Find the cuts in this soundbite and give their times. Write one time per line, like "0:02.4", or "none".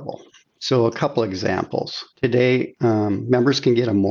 none